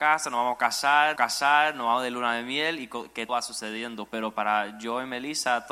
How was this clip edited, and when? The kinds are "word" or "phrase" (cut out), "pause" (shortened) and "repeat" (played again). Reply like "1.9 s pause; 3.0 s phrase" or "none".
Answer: 1.2 s repeat; 3.3 s word